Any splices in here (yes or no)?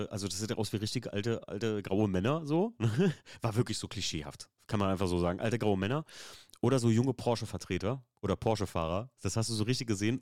no